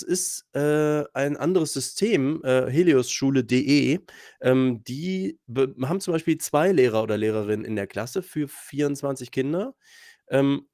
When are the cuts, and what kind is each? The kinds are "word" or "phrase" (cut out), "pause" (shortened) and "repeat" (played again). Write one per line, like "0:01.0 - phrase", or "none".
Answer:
0:05.4 - pause

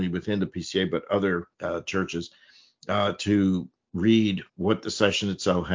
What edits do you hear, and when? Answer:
0:01.5 - pause
0:04.5 - pause

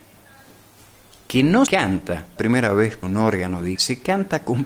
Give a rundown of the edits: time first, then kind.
0:01.7 - word
0:02.4 - word
0:03.0 - word
0:03.7 - word

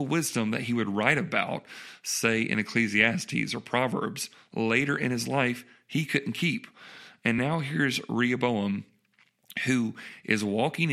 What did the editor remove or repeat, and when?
none

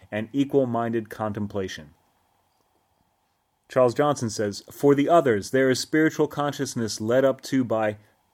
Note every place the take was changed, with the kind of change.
none

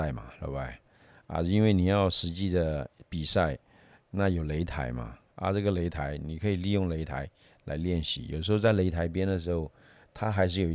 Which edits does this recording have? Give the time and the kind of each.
none

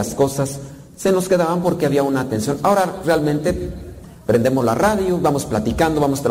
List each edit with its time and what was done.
none

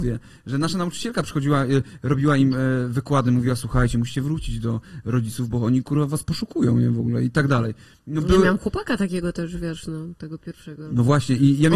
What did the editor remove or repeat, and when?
none

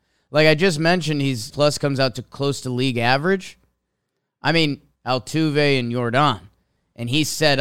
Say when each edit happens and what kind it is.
0:01.5 - phrase
0:05.0 - phrase

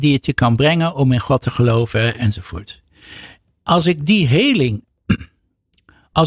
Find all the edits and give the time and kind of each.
none

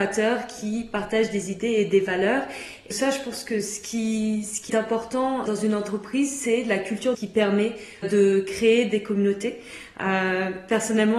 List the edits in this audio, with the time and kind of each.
0:02.9 - word
0:04.7 - word
0:05.5 - word
0:07.1 - word
0:08.0 - word

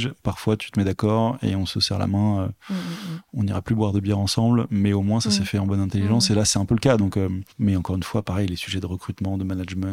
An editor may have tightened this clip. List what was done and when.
0:07.5 - pause

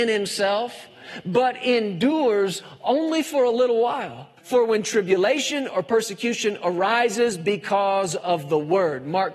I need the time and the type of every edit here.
0:04.4 - pause

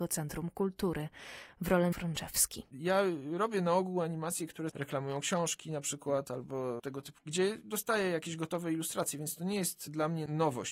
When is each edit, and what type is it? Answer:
0:01.9 - phrase
0:02.7 - pause
0:07.2 - word

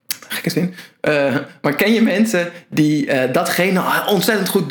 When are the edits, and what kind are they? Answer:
none

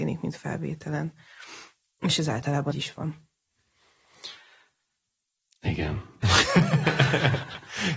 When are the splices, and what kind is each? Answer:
0:02.7 - word

